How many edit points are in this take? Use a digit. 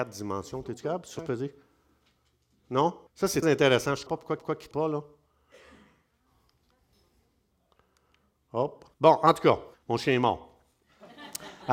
8